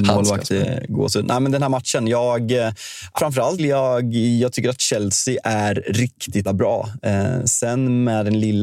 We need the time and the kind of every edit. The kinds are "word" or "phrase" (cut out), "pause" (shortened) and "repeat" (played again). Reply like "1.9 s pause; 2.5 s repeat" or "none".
3.2 s word; 3.6 s word; 6.5 s word